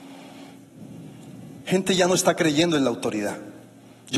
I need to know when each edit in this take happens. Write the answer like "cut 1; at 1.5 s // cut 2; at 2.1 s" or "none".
cut 1; at 1.6 s